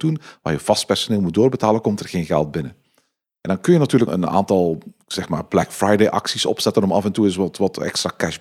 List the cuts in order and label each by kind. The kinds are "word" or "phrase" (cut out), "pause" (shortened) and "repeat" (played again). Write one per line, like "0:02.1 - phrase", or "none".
0:04.1 - word